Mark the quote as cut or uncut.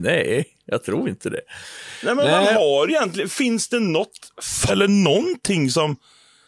cut